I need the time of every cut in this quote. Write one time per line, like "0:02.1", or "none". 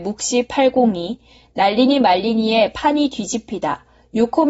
none